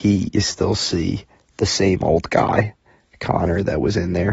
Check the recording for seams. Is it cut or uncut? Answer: uncut